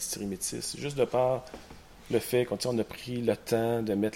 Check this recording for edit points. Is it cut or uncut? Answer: uncut